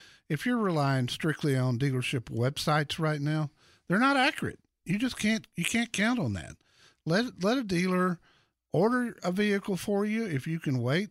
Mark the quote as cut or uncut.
uncut